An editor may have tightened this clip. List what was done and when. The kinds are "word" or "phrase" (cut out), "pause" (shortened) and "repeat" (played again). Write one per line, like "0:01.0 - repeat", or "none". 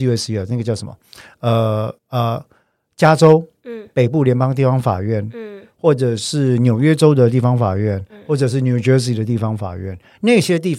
0:02.0 - pause